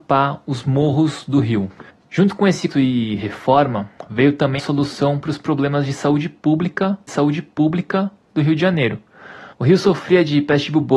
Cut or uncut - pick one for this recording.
cut